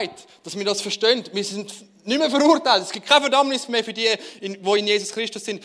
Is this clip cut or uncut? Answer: uncut